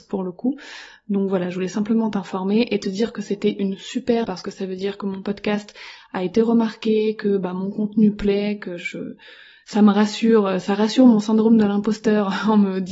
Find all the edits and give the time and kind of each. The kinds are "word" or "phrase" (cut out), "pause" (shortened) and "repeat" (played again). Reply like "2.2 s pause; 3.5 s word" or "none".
4.2 s word

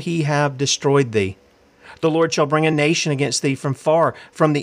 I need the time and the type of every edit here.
none

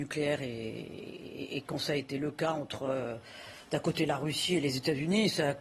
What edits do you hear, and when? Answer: none

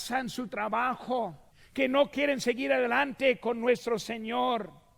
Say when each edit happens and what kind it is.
1.5 s pause

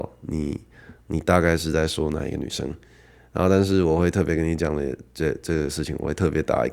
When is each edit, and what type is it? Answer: none

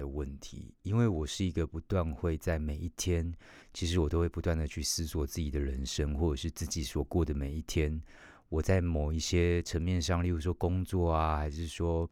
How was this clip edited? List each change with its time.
3.6 s pause

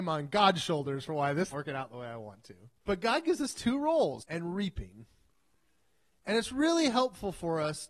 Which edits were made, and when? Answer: 1.5 s phrase; 2.8 s pause; 4.2 s word

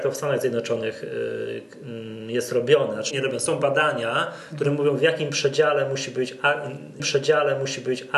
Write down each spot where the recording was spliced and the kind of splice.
3.1 s word; 7.0 s repeat

